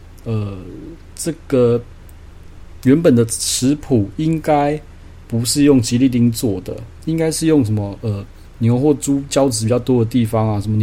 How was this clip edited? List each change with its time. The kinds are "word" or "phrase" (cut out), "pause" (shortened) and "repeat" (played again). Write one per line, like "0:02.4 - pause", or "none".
none